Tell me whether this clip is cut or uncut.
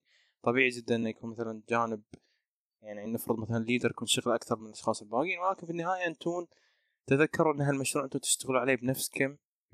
uncut